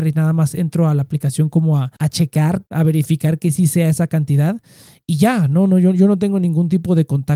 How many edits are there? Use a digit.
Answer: 2